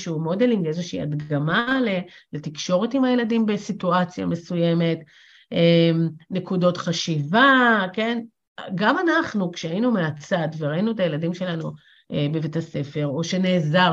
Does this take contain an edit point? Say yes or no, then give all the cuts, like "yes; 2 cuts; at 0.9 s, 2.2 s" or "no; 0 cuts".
no; 0 cuts